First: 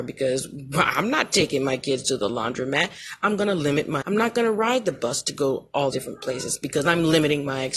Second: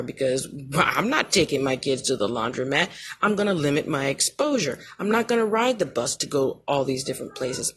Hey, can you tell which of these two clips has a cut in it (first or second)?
first